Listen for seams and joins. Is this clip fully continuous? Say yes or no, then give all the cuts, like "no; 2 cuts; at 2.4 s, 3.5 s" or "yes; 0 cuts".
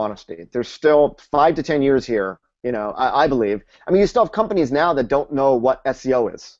yes; 0 cuts